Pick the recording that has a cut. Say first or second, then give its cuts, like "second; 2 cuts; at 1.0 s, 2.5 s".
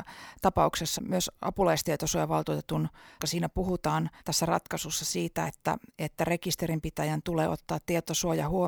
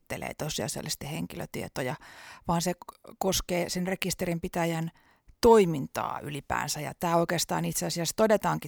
first; 3 cuts; at 1.0 s, 3.2 s, 4.2 s